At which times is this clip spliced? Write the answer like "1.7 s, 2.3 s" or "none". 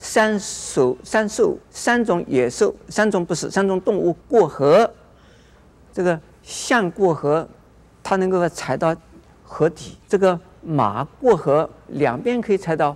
1.6 s, 4.2 s, 10.0 s